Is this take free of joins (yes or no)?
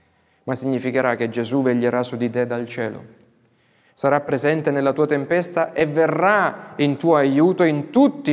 yes